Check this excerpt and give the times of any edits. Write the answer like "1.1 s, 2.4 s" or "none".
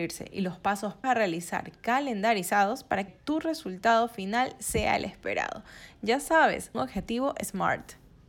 1.0 s, 3.1 s, 6.7 s